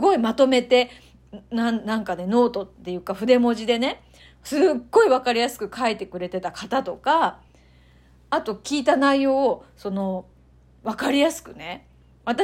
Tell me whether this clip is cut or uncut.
uncut